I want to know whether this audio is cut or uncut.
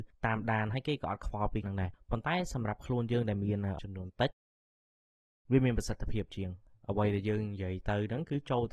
cut